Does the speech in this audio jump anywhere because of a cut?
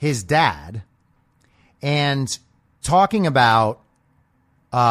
yes; 1 cut; at 2.8 s

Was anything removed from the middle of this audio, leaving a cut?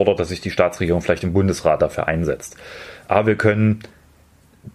yes; 1 cut; at 1.8 s

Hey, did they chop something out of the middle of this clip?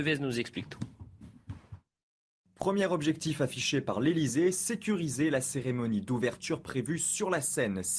no; 0 cuts

